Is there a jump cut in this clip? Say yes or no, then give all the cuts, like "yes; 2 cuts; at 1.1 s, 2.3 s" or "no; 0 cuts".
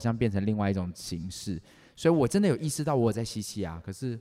no; 0 cuts